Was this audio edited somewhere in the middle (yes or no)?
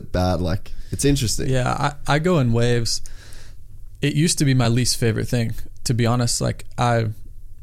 no